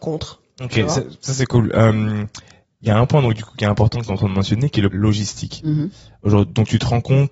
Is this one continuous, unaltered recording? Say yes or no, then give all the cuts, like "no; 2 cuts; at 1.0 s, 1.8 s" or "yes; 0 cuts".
no; 1 cut; at 4.9 s